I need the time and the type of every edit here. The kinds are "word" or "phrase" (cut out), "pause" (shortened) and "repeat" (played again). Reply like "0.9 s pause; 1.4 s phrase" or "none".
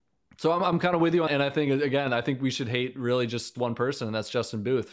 1.3 s word; 3.5 s word